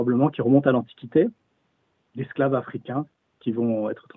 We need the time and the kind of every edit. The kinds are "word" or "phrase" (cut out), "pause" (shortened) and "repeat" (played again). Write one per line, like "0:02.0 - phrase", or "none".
none